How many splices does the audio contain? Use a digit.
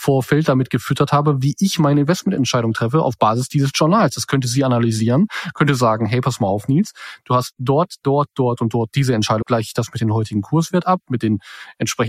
1